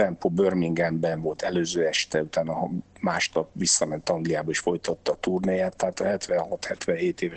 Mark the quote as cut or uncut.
uncut